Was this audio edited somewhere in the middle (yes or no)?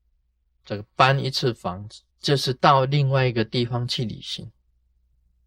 yes